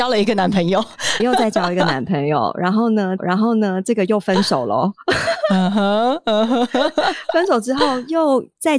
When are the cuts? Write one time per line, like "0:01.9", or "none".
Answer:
0:01.2
0:03.2